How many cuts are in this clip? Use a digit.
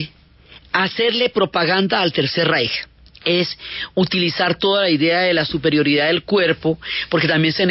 1